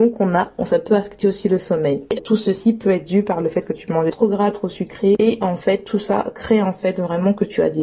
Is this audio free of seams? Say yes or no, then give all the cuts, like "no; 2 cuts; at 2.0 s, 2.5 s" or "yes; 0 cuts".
no; 2 cuts; at 2.2 s, 4.1 s